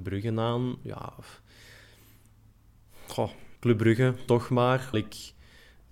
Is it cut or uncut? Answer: cut